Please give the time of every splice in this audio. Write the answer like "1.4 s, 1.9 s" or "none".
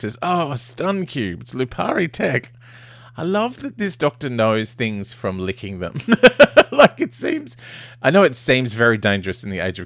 none